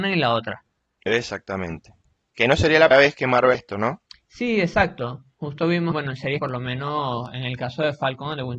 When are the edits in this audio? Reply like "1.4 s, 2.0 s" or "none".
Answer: 2.9 s, 3.5 s, 5.9 s, 6.4 s